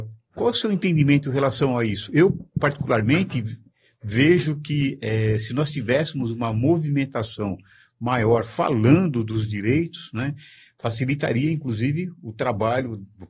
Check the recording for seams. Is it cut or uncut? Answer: uncut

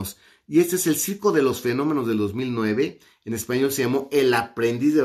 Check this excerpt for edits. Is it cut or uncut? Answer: uncut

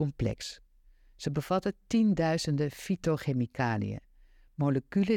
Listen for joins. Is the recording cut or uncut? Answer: uncut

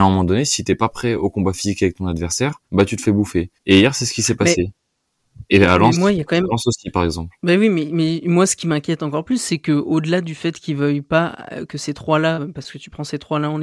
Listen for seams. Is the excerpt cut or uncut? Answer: cut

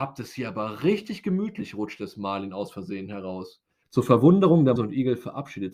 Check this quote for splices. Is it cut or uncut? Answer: cut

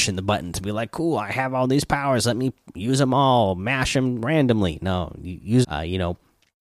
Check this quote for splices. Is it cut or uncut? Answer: cut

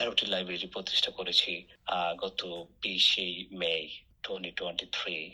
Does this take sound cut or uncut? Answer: uncut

